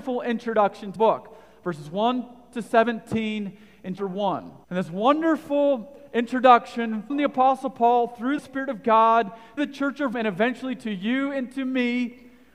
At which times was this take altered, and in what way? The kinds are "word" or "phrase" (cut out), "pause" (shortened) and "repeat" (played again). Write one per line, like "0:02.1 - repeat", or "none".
0:01.0 - word
0:04.0 - word
0:04.6 - pause
0:07.1 - word
0:08.4 - phrase
0:09.6 - word
0:10.1 - word

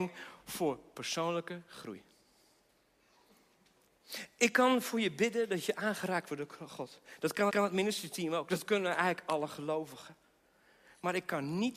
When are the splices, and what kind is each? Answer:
0:07.5 - repeat

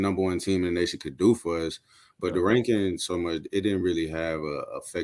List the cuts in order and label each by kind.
none

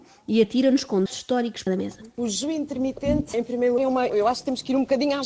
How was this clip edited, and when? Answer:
0:01.1 - word
0:01.7 - word
0:03.3 - word
0:03.8 - word
0:04.1 - word

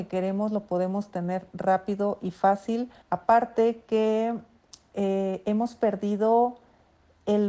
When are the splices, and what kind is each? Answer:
0:03.0 - pause

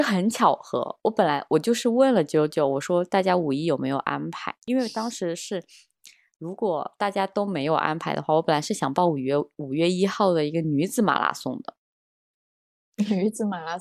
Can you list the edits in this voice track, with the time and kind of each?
none

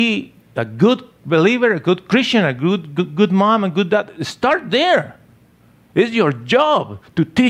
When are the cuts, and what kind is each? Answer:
none

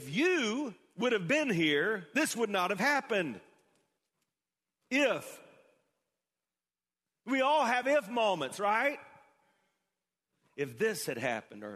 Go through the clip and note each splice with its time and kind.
none

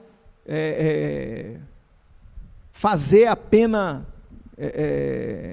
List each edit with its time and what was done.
none

